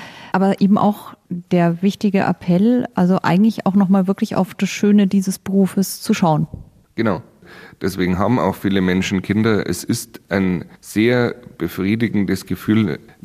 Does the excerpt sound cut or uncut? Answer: uncut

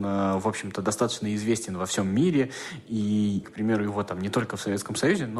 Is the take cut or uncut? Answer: cut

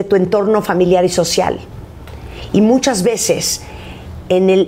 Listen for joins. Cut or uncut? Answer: uncut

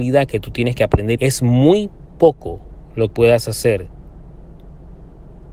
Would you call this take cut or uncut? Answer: cut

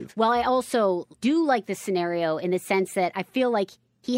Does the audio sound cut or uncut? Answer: cut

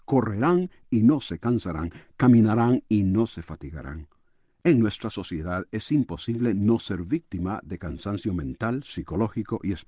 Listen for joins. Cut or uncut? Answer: uncut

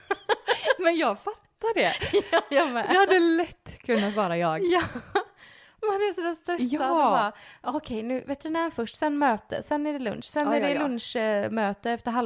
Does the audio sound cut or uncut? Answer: uncut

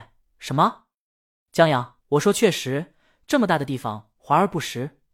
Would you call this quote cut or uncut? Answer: cut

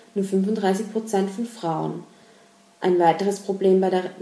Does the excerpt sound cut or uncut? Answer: uncut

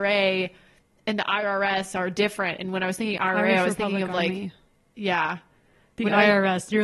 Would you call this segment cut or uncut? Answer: uncut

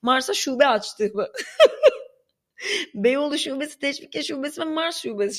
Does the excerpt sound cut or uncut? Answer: uncut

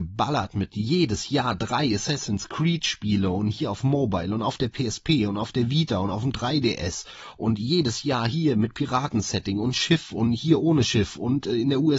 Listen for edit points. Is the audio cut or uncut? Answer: uncut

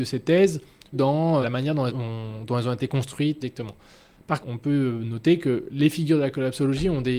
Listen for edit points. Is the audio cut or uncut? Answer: cut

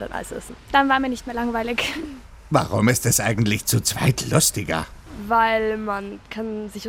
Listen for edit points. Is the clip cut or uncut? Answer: uncut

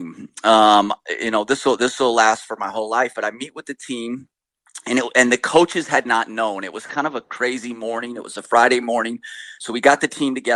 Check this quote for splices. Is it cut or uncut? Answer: uncut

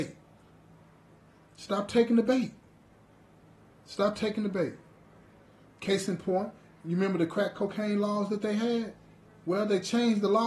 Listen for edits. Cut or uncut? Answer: uncut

